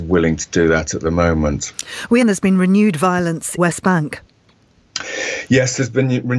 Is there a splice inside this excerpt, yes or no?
yes